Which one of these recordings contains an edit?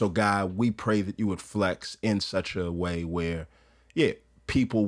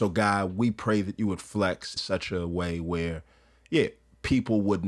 second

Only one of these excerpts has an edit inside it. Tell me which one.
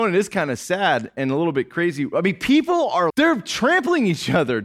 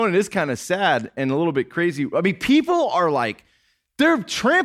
first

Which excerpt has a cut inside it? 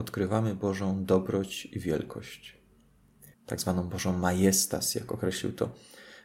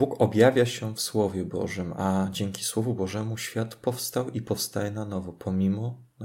first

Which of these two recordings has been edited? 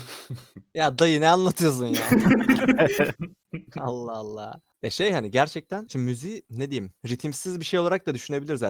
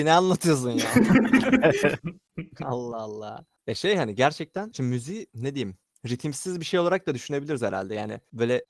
first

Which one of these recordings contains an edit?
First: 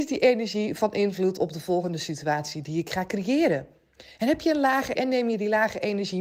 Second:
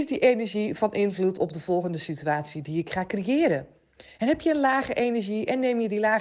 first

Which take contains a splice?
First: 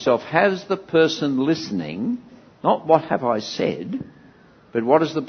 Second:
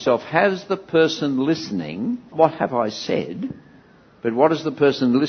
second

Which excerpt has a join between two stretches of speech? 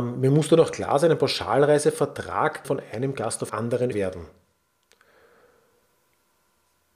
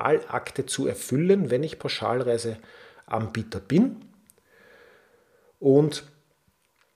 first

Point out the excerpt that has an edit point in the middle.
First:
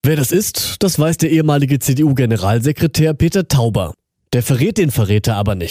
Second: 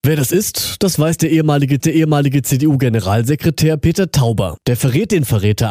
second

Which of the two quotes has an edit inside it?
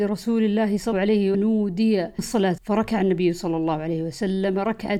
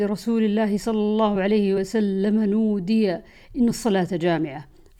first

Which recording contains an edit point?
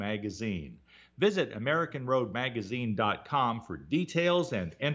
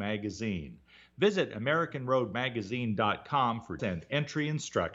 second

